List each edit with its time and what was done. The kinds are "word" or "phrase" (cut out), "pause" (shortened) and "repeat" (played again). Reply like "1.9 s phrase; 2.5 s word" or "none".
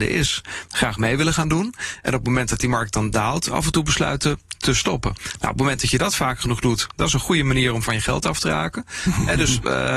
none